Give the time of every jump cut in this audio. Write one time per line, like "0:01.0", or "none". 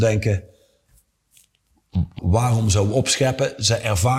0:02.2

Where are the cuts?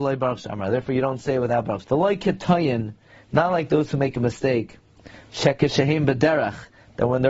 0:01.8

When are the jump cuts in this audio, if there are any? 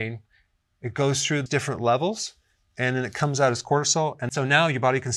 0:01.5

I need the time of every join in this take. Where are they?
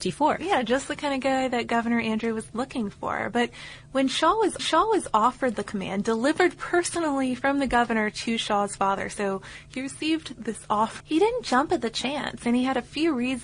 0:04.6
0:10.4
0:11.0

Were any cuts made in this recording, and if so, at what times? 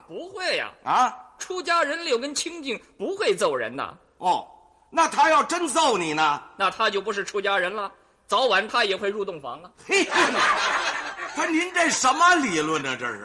none

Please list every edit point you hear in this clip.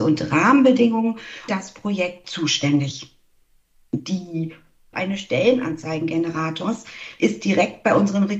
0:01.5
0:02.2
0:04.9

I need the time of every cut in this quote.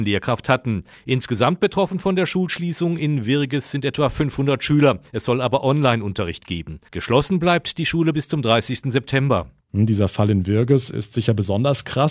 0:05.1
0:06.9

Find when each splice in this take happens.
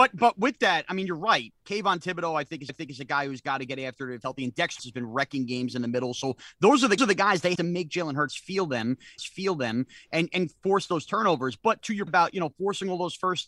0:02.7
0:04.2
0:04.8
0:07.0
0:07.5
0:09.2
0:12.1

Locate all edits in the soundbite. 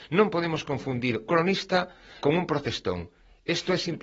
0:01.3
0:02.2

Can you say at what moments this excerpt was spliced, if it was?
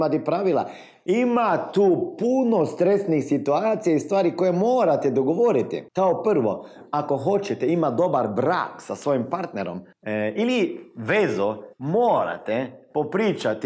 0:05.9
0:09.9
0:11.7

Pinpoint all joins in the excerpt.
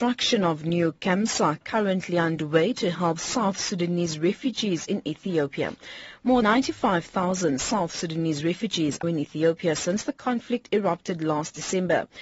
0:06.4
0:09.0

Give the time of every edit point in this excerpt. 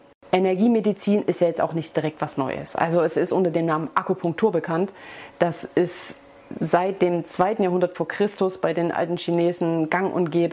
none

